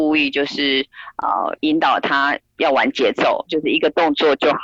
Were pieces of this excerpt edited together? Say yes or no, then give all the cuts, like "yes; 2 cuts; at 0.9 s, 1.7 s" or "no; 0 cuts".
yes; 1 cut; at 2.5 s